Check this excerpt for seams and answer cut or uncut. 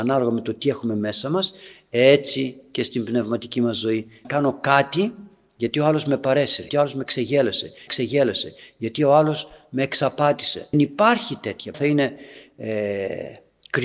cut